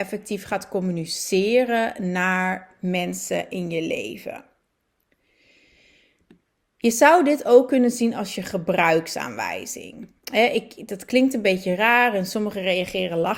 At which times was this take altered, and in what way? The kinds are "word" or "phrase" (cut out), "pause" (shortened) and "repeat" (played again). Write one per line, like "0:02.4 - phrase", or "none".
none

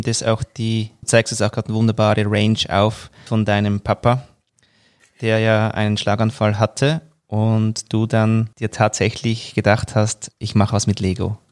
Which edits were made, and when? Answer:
0:01.0 - word
0:03.3 - word
0:08.5 - pause

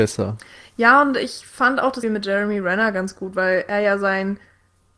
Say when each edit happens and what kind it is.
0:02.0 - word

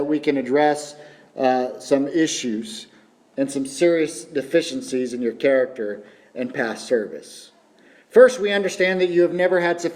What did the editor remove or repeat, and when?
none

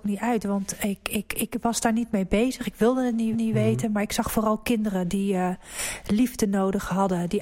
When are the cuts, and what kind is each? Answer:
0:01.3 - word
0:03.3 - repeat

